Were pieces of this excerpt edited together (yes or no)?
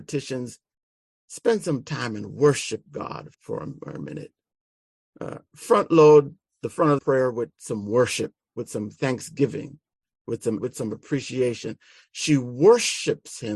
yes